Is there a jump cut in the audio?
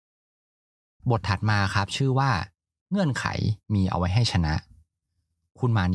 no; 0 cuts

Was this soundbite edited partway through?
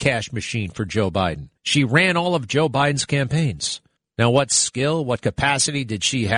yes; 2 cuts; at 1.6 s, 4.0 s

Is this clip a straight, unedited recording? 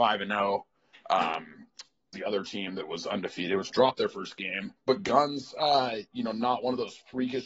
no; 3 cuts; at 2.1 s, 3.7 s, 4.8 s

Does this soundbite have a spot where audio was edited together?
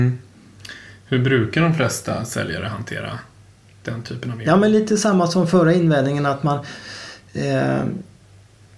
no; 0 cuts

